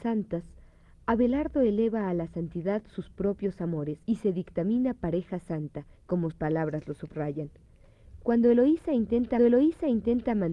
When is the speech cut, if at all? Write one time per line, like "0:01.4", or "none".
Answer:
0:04.0
0:06.3
0:09.4